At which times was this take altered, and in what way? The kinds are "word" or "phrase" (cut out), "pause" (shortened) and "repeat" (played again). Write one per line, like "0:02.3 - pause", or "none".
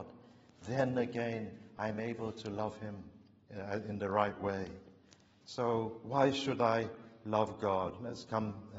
none